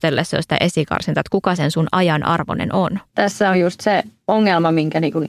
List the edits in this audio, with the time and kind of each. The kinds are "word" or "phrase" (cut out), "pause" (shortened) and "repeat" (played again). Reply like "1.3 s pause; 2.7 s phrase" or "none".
3.1 s pause; 4.2 s pause